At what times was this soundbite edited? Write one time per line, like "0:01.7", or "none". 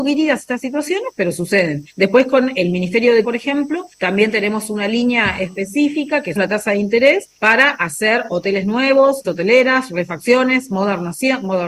0:01.9
0:03.2
0:03.9
0:06.4
0:07.4
0:09.2